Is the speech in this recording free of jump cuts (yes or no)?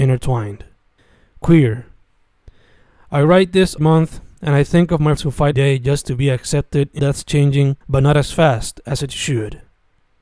no